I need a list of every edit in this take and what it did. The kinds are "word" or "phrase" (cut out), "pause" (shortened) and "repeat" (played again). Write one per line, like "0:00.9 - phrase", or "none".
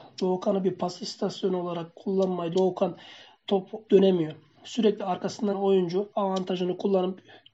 0:02.5 - word
0:03.9 - word
0:05.5 - word
0:06.1 - word